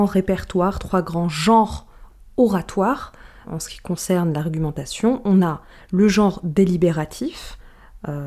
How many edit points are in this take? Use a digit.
1